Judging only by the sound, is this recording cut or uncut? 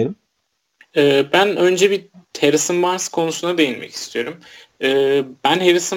uncut